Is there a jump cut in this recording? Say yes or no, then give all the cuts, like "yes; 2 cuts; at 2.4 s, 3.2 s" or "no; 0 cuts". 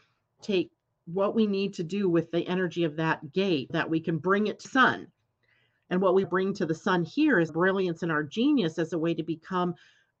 yes; 4 cuts; at 3.7 s, 4.6 s, 6.2 s, 7.5 s